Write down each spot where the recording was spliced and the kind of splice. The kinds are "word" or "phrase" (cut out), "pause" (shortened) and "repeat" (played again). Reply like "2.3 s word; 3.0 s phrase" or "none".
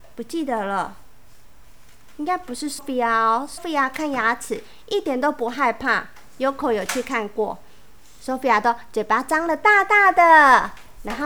2.8 s word; 3.6 s word